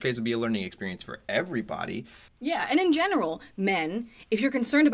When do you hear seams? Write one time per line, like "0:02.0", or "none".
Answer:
none